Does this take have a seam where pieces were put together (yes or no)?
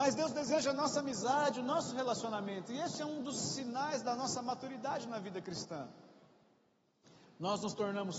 no